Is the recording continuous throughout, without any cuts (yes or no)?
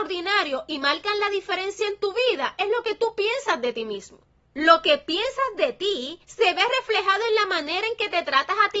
yes